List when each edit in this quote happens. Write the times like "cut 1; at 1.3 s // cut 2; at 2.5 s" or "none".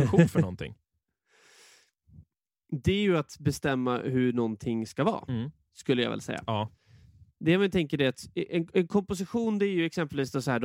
none